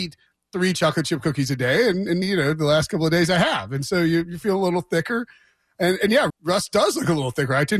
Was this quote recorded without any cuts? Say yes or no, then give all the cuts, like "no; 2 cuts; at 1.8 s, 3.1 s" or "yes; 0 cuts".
no; 2 cuts; at 2.2 s, 6.3 s